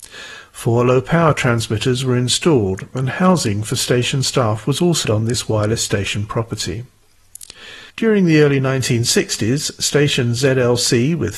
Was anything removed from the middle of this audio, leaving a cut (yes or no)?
yes